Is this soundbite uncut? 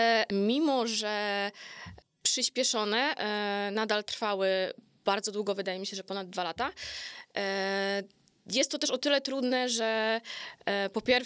yes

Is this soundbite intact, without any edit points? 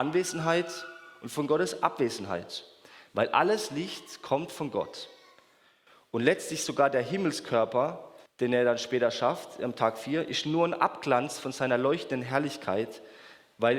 no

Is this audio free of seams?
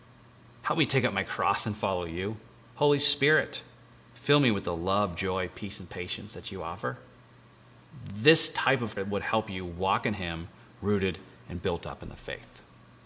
no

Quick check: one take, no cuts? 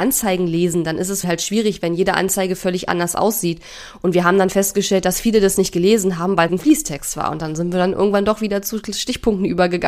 no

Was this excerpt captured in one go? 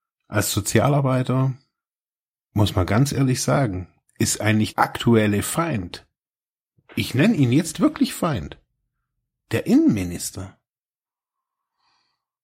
no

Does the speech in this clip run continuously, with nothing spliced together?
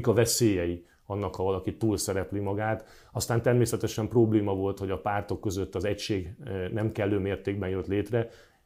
yes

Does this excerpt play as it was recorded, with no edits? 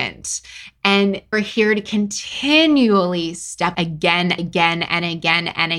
no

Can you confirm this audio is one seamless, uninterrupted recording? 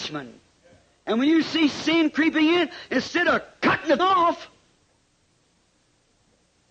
no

